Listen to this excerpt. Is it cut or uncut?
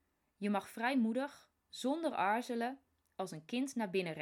cut